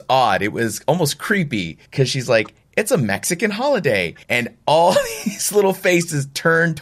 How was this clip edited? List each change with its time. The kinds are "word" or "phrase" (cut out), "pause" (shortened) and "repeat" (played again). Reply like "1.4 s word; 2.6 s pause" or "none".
1.9 s pause; 4.2 s pause